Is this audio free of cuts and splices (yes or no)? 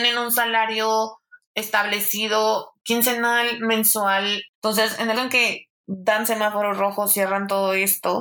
no